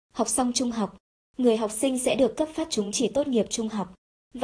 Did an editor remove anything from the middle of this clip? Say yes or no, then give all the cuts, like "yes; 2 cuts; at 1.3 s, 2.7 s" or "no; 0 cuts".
no; 0 cuts